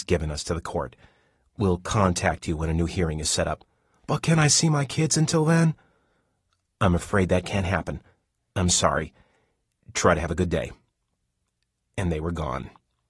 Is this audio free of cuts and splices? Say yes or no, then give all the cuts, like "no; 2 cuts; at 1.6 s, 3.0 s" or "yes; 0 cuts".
yes; 0 cuts